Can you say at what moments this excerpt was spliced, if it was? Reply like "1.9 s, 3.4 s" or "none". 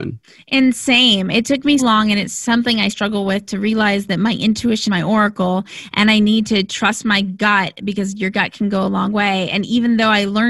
1.8 s, 2.9 s, 4.9 s